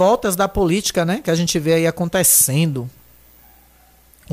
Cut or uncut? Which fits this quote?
uncut